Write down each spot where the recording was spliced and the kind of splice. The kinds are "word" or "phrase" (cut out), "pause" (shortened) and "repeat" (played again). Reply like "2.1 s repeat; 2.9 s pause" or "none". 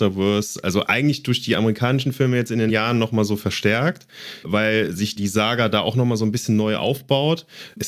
2.7 s word; 4.4 s word; 5.2 s word